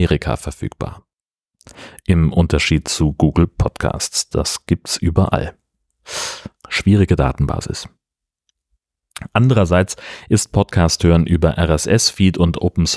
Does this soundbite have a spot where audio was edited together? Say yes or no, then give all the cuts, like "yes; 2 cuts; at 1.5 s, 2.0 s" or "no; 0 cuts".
yes; 1 cut; at 6.6 s